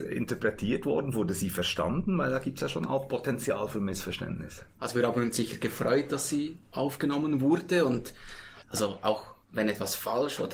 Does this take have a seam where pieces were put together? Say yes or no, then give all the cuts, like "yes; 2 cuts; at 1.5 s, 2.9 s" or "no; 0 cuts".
yes; 1 cut; at 9.4 s